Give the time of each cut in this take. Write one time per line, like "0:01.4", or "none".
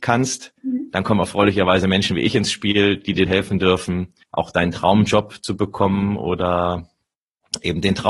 0:03.3
0:04.2